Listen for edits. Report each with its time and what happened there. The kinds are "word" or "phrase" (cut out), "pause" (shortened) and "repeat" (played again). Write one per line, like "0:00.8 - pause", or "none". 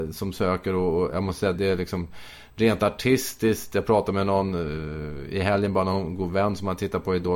0:01.5 - word